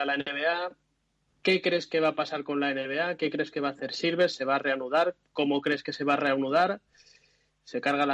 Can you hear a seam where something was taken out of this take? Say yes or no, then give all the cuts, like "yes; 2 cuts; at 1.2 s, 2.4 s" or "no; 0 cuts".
no; 0 cuts